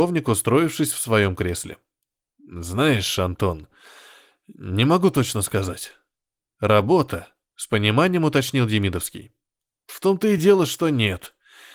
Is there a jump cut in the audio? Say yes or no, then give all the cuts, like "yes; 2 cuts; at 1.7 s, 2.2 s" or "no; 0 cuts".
no; 0 cuts